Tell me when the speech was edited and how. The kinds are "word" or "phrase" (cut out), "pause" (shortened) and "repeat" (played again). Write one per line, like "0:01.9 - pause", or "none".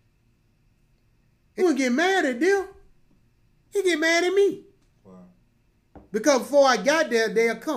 0:01.6 - word